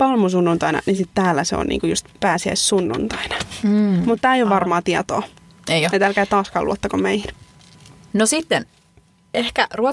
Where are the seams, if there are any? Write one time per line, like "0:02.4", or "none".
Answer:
none